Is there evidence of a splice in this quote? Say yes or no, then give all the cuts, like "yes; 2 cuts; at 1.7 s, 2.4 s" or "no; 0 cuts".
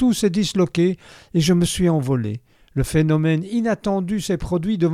no; 0 cuts